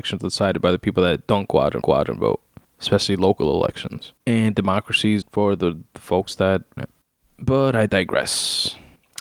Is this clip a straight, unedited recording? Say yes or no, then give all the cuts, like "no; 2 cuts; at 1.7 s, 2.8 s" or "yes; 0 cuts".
no; 4 cuts; at 1.8 s, 4.2 s, 5.2 s, 6.8 s